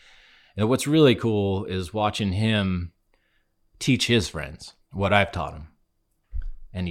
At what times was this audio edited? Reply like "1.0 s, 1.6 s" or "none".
4.8 s

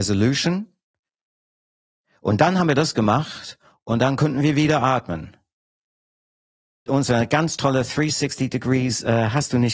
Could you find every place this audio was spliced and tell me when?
6.9 s

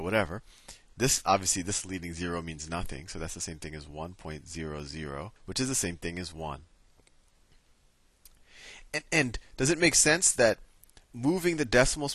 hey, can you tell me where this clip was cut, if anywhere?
5.4 s, 11.0 s

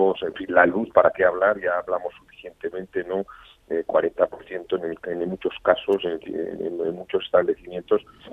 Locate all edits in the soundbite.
none

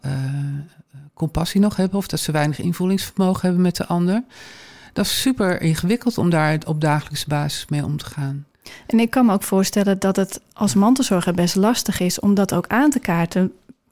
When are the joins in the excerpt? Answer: none

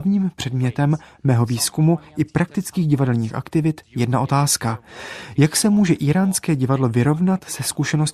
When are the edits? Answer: none

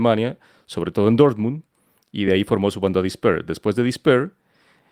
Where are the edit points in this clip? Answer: none

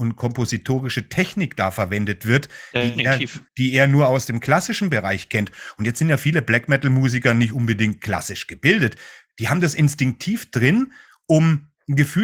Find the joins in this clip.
3.5 s

